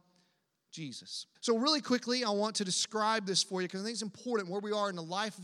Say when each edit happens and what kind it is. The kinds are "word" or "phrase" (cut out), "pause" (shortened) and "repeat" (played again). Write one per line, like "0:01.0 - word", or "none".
0:01.3 - pause